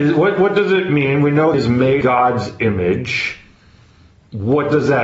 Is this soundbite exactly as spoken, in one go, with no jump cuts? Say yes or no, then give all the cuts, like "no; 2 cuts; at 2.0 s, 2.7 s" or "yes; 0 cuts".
no; 2 cuts; at 1.5 s, 2.0 s